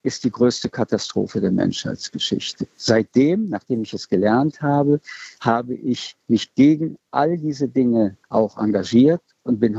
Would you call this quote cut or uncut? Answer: cut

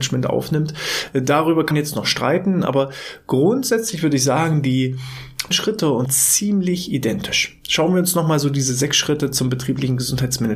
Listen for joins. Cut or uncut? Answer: cut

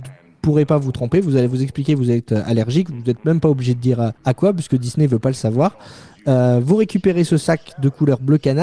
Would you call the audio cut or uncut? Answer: cut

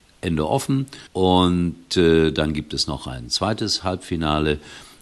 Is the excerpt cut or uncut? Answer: cut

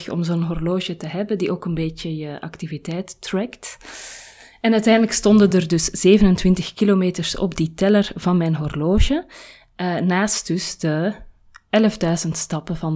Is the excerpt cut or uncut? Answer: uncut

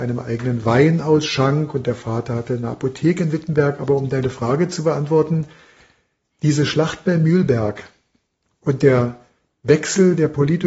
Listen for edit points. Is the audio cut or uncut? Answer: uncut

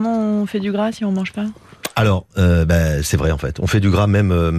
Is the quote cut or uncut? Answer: uncut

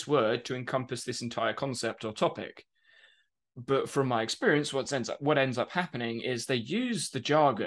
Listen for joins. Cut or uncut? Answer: uncut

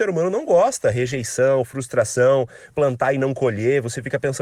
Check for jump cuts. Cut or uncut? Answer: cut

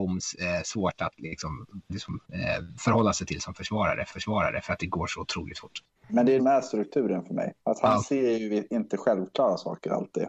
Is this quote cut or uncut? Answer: cut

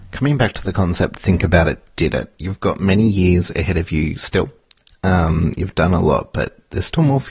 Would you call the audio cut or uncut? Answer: uncut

